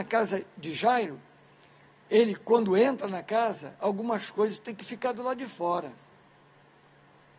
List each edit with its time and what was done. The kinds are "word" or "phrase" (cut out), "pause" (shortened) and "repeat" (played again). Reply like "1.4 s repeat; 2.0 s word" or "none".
none